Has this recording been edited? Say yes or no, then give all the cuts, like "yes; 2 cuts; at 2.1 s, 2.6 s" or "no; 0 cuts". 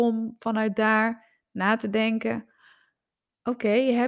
no; 0 cuts